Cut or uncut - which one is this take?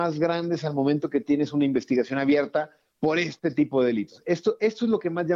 uncut